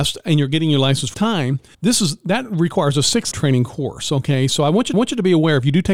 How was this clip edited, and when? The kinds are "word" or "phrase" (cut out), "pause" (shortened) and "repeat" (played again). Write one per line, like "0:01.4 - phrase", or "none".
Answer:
0:01.1 - phrase
0:01.7 - pause
0:03.3 - word
0:04.9 - repeat